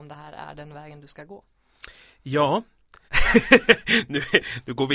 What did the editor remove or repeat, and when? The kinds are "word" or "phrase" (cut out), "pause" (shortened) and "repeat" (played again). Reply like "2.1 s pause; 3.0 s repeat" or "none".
3.1 s pause